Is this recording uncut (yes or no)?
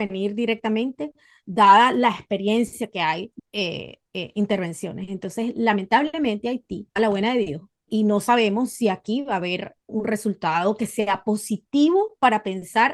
no